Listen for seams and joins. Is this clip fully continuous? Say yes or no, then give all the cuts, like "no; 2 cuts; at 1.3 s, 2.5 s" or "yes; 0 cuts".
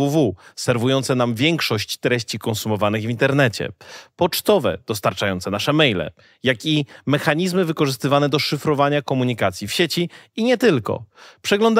yes; 0 cuts